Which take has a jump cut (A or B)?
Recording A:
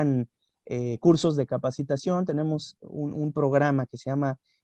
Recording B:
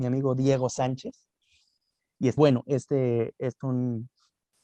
B